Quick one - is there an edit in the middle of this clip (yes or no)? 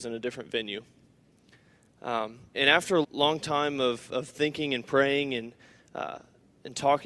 yes